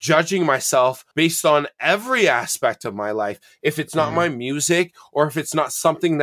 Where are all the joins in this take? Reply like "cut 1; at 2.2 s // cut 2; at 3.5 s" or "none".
cut 1; at 1.1 s